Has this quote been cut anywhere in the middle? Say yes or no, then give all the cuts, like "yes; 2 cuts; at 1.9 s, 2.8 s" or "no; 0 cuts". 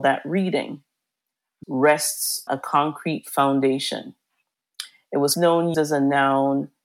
yes; 4 cuts; at 1.6 s, 2.5 s, 5.3 s, 5.7 s